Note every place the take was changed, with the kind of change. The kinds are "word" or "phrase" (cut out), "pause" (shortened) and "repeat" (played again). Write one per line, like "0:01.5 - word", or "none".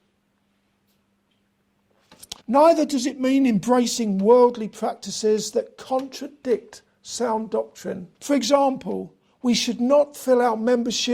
0:02.4 - pause
0:08.1 - pause

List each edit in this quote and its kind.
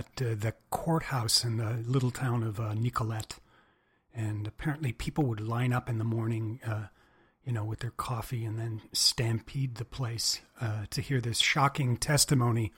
none

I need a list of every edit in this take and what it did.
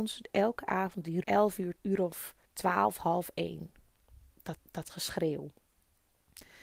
0:01.2 - phrase
0:01.8 - word
0:02.4 - pause
0:04.6 - repeat

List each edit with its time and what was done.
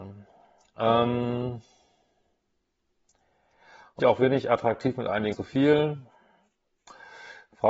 0:04.0 - word
0:05.3 - word

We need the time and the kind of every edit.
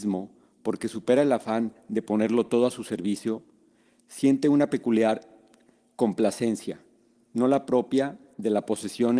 none

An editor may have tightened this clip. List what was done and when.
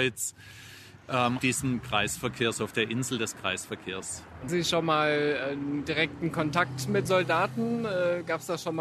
0:01.4 - word
0:04.5 - word
0:07.1 - word

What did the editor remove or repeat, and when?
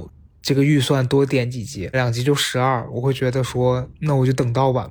0:01.9 - phrase

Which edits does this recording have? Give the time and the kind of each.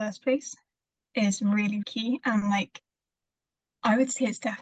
0:01.8 - word

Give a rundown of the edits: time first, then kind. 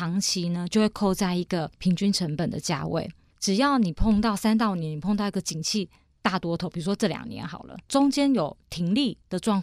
none

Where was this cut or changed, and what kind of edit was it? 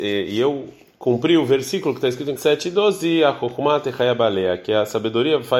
0:02.4 - word

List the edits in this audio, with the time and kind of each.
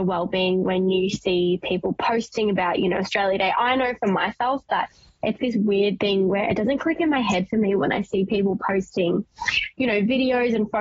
0:05.4 - word

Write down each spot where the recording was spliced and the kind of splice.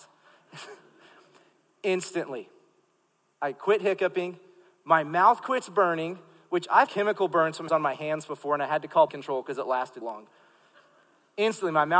0:06.9 - word
0:07.7 - word
0:09.1 - word
0:10.0 - word

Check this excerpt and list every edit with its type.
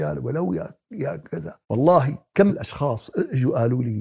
0:01.6 - pause
0:02.5 - word

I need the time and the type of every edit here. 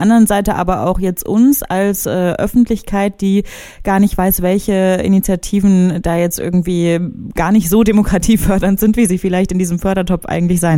none

